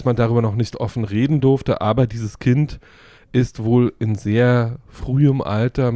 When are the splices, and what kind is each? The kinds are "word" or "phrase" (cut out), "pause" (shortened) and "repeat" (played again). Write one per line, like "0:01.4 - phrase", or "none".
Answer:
none